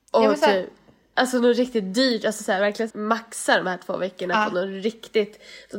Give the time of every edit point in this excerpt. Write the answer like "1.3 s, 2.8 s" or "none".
2.9 s

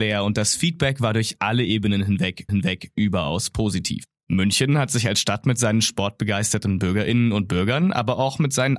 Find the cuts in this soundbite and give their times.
2.5 s

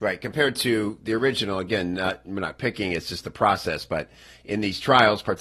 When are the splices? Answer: none

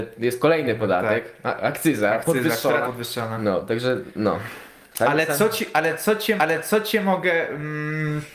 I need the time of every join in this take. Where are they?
2.8 s, 6.4 s

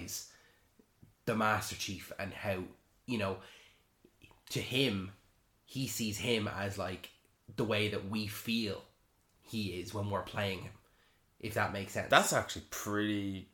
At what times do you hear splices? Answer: none

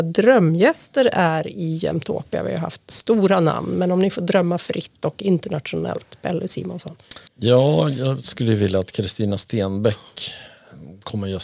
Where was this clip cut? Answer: 7.3 s

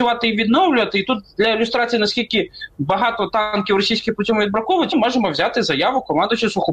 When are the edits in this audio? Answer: 4.9 s

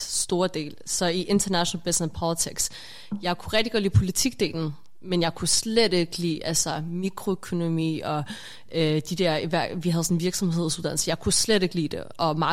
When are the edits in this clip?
none

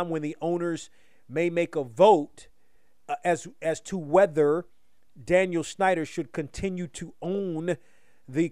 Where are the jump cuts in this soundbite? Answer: none

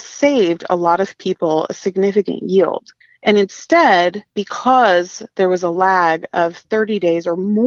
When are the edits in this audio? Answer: 3.0 s

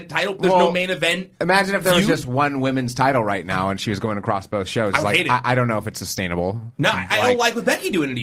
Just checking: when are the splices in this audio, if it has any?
1.3 s, 6.7 s, 7.1 s

